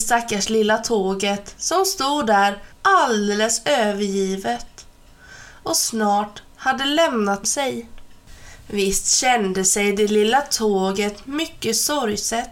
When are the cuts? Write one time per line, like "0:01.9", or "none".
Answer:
0:02.7
0:07.4